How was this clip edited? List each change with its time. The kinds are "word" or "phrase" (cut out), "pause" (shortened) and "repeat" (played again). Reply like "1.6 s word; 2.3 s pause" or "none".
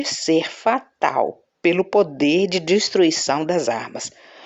none